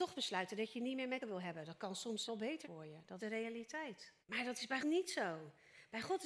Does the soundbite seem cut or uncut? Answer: cut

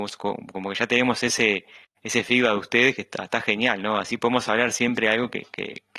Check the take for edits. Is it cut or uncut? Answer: uncut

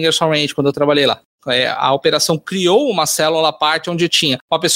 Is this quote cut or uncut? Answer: uncut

